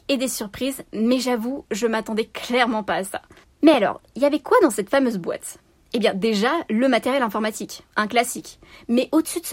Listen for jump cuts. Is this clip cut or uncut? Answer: uncut